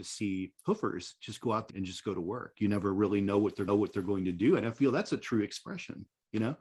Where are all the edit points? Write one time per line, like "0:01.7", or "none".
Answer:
0:01.7
0:03.7

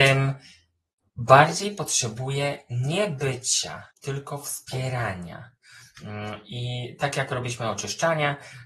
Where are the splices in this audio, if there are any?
0:03.9

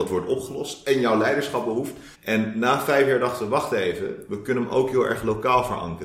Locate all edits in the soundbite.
0:02.1

